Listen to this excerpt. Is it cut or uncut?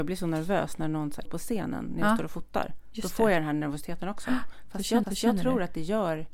cut